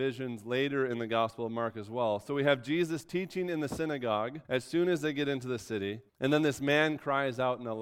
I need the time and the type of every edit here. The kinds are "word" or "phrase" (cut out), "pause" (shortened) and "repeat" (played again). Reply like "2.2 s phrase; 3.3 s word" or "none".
4.4 s pause; 6.1 s pause